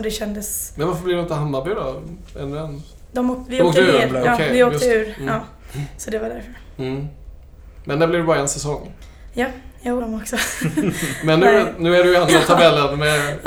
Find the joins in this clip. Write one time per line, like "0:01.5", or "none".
0:10.0
0:12.3